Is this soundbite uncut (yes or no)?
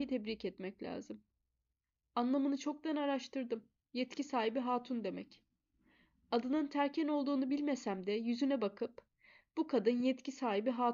yes